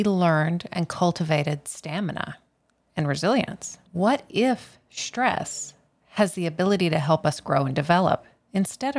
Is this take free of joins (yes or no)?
no